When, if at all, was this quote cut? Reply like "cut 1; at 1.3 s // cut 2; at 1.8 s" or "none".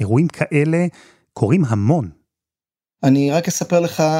none